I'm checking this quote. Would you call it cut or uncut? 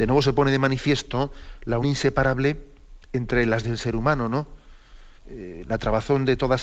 cut